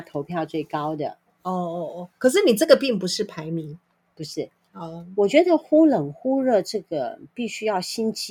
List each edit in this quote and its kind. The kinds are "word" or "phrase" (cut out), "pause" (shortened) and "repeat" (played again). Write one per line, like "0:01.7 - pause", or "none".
none